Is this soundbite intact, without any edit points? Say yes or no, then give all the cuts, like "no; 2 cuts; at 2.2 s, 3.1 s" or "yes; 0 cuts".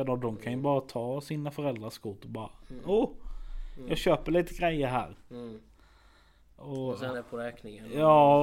no; 1 cut; at 7.1 s